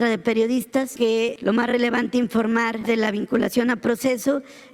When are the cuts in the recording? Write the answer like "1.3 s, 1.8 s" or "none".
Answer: 0.9 s, 2.8 s